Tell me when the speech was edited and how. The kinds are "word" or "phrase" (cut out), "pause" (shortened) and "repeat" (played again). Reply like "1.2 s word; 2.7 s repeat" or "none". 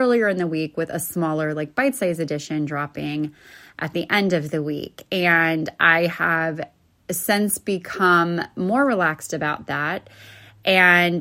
none